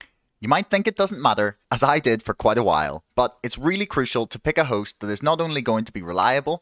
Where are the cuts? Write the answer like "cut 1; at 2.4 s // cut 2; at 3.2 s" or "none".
cut 1; at 1.6 s // cut 2; at 3.1 s